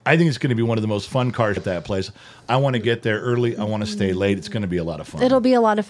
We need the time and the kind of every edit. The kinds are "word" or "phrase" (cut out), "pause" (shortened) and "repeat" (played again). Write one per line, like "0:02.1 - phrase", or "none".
0:01.6 - phrase